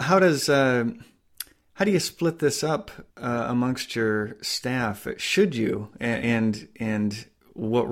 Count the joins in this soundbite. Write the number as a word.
one